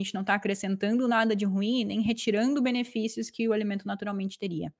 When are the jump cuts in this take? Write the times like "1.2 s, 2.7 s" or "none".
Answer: none

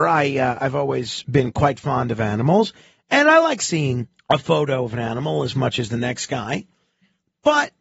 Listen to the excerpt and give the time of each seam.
4.2 s

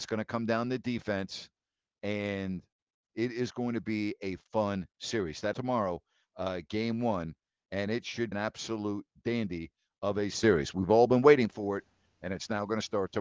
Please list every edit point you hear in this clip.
4.5 s, 5.5 s, 8.3 s

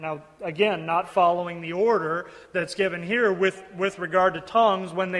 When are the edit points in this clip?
none

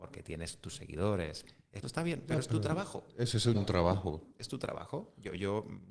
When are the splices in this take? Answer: 1.8 s, 3.5 s

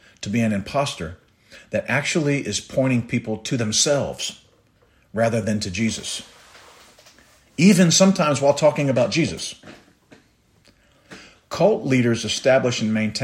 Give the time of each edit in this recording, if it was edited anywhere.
none

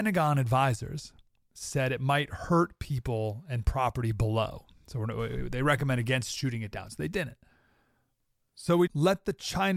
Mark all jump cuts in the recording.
8.9 s

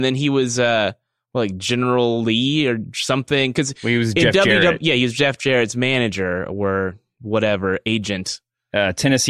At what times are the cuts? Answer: none

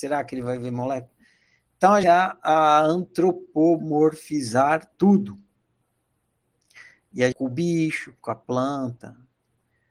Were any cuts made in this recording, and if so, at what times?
2.0 s, 4.9 s, 7.3 s

